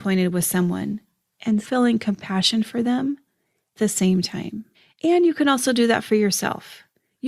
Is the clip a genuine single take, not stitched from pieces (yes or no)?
no